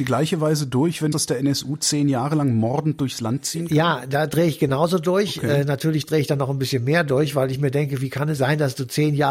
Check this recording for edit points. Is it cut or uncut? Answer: cut